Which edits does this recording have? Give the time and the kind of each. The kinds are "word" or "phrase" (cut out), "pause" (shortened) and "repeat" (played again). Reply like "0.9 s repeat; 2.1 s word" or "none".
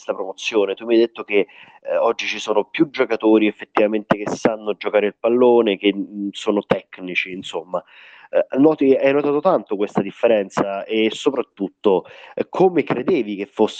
none